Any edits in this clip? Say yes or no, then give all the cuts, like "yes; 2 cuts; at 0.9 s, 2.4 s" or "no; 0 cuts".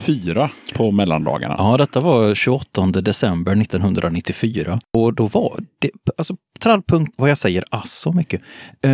yes; 1 cut; at 7.1 s